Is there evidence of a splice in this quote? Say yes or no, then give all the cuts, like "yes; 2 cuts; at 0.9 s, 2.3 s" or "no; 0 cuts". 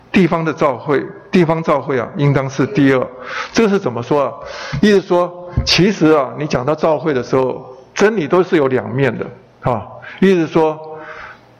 no; 0 cuts